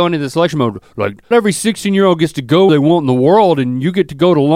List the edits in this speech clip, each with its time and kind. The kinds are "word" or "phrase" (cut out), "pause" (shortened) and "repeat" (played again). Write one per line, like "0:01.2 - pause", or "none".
0:01.3 - word
0:02.7 - word

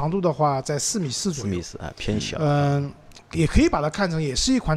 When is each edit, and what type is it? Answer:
none

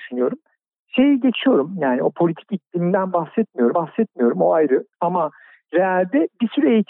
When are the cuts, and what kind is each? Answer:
0:03.7 - repeat
0:04.9 - pause

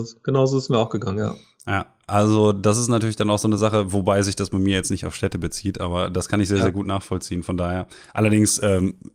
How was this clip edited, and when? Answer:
none

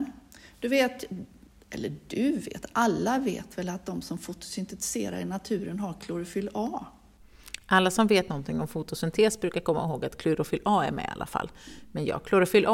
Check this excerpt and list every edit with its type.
none

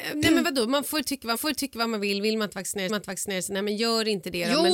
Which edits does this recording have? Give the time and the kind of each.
0:01.3 - repeat
0:02.9 - repeat

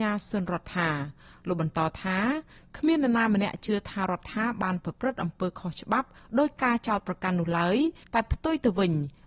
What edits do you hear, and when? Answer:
none

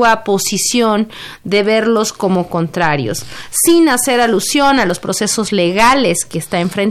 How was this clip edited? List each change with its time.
none

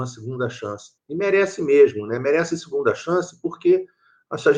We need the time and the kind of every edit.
0:01.0 - pause

